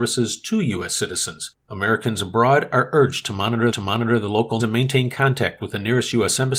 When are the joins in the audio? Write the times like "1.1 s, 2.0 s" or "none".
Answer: 1.6 s, 3.7 s, 4.6 s